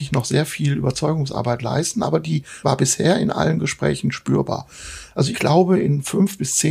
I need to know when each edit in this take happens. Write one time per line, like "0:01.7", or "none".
0:02.6
0:05.3